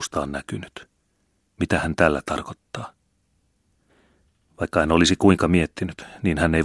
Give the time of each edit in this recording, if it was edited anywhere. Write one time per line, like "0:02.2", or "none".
none